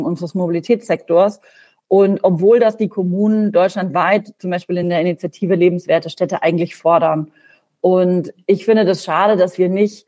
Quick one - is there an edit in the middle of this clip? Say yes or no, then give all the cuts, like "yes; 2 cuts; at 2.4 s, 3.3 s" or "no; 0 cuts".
no; 0 cuts